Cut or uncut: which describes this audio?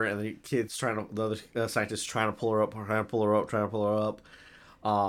uncut